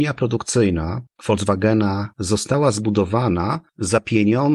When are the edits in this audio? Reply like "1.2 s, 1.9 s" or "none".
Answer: 2.1 s